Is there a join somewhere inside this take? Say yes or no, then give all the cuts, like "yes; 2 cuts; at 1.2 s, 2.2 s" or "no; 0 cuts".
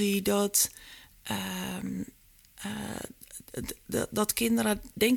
no; 0 cuts